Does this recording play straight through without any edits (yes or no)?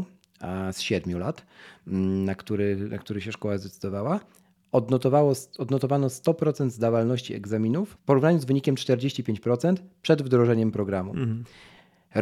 yes